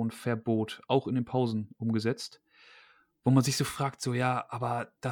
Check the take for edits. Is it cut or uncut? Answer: uncut